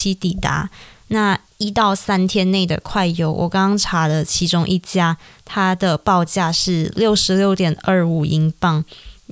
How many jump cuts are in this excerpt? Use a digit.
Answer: 0